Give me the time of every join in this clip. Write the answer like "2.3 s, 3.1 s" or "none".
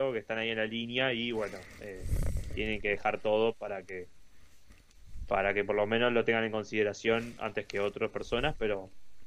none